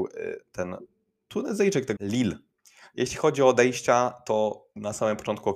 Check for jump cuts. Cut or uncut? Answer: cut